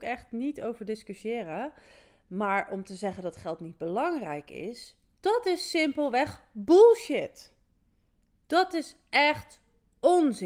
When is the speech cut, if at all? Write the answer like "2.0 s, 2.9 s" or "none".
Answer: none